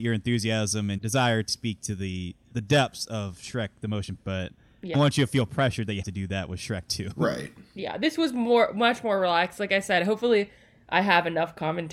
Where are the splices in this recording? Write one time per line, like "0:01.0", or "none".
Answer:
0:01.0
0:01.5
0:02.5
0:04.2
0:04.9
0:06.0

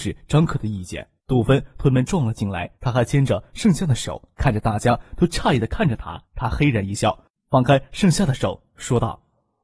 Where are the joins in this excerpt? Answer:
0:01.2
0:02.7
0:04.3
0:06.2

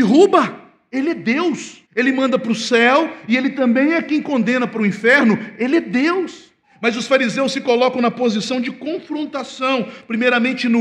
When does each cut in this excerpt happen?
0:01.9
0:06.6

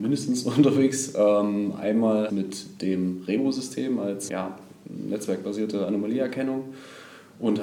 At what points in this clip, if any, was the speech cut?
0:02.3
0:04.3

